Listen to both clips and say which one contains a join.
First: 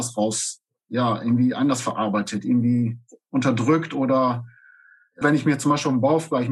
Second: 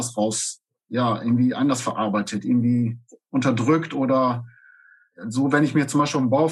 first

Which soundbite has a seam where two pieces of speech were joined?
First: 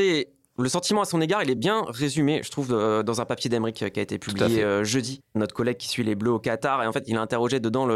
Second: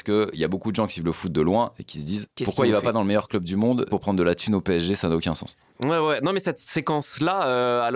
second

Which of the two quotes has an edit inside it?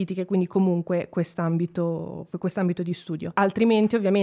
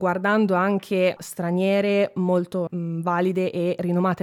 second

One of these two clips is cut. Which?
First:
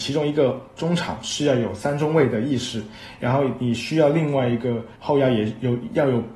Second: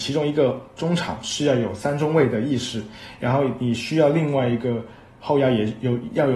first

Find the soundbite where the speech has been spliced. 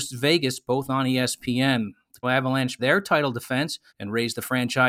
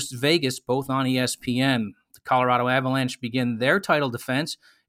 first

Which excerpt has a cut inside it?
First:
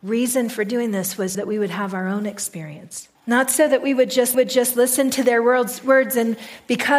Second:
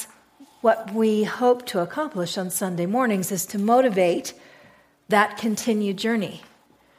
first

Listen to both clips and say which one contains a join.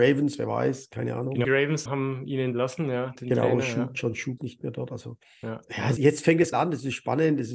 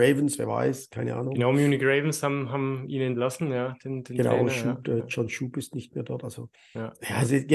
first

